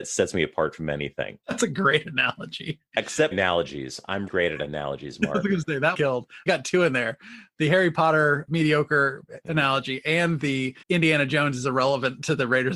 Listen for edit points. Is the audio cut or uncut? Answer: cut